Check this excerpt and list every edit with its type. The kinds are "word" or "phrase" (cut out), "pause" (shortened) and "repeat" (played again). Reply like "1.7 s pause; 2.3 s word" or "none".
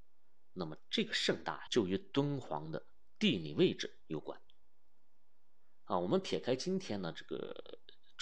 1.7 s word